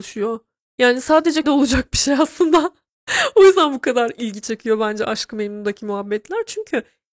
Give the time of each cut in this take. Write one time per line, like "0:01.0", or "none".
0:01.4